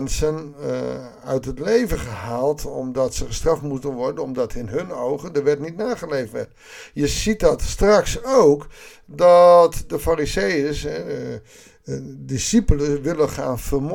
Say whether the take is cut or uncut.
uncut